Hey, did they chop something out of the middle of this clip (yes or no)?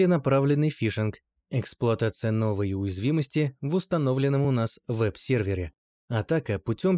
no